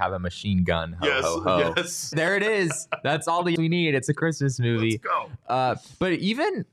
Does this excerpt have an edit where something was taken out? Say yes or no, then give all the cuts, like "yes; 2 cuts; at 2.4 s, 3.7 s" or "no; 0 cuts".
yes; 2 cuts; at 2.1 s, 3.6 s